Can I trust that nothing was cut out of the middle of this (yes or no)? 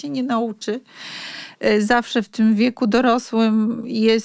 yes